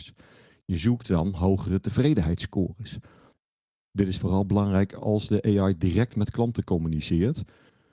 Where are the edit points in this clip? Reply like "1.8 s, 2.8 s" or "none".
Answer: none